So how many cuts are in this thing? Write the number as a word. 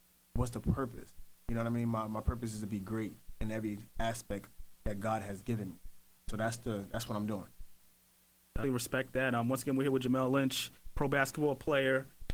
two